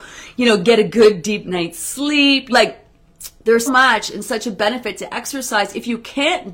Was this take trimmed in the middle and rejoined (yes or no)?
yes